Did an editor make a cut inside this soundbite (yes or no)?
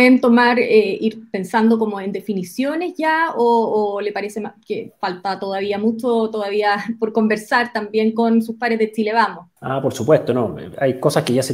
yes